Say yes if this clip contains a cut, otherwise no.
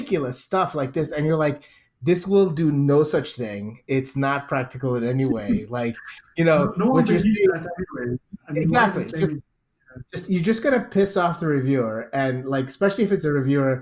no